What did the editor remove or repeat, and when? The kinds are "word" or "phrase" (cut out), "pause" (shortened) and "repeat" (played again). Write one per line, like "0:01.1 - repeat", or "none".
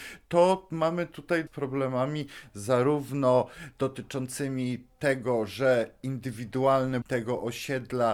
0:01.5 - phrase
0:07.0 - word